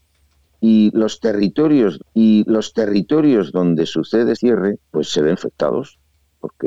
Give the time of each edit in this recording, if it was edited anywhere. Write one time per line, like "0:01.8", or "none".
0:02.0
0:04.3
0:04.8
0:05.3